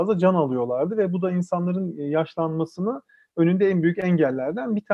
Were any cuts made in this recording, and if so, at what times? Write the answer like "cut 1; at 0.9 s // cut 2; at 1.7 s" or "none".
none